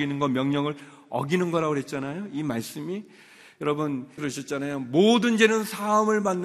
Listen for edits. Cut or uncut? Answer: cut